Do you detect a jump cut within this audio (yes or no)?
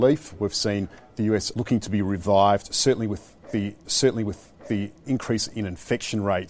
yes